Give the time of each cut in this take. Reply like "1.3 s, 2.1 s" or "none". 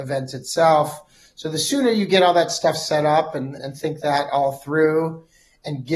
3.6 s